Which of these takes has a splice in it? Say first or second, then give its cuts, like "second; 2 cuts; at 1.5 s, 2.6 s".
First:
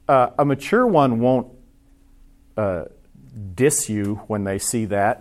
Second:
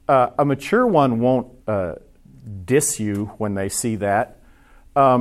second; 1 cut; at 1.6 s